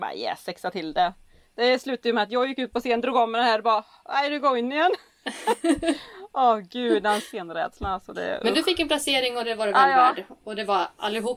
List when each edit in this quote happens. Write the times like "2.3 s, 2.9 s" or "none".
none